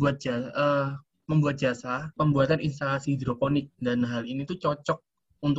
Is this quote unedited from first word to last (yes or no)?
no